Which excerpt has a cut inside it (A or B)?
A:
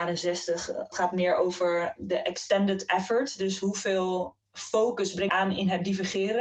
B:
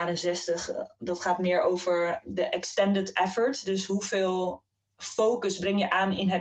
A